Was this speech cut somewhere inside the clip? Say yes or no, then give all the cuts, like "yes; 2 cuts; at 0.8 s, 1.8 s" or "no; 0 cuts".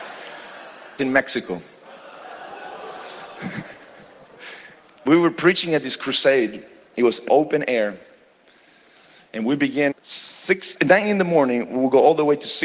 yes; 4 cuts; at 1.0 s, 5.1 s, 7.3 s, 9.9 s